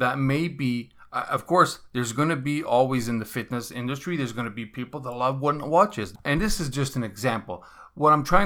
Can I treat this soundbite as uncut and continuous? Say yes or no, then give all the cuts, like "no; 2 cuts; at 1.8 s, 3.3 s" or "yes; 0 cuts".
yes; 0 cuts